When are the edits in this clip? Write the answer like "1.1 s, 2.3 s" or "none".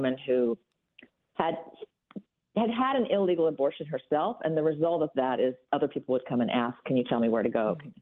none